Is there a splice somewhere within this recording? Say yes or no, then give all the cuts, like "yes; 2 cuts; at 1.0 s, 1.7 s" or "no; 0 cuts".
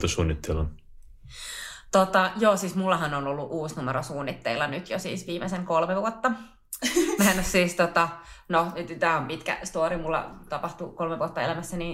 no; 0 cuts